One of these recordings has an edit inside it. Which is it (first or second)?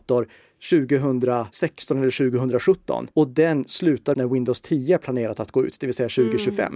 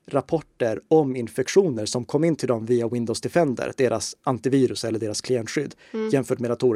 first